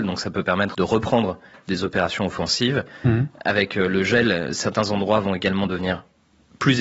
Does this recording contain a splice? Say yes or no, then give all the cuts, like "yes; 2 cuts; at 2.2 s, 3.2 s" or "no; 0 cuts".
no; 0 cuts